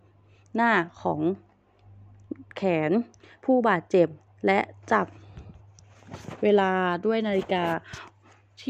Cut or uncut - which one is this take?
cut